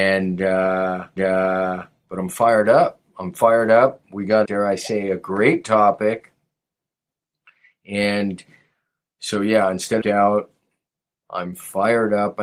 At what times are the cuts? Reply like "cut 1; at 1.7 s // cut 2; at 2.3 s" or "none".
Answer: cut 1; at 1.2 s // cut 2; at 4.4 s // cut 3; at 10.0 s